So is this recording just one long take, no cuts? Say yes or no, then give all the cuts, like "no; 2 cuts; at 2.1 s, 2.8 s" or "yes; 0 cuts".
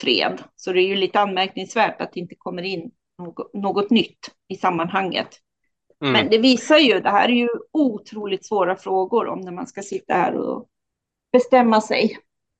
yes; 0 cuts